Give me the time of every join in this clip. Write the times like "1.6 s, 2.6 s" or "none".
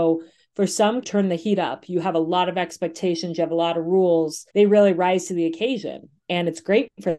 1.0 s, 4.5 s